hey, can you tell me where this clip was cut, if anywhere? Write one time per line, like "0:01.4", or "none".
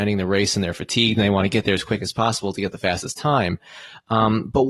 none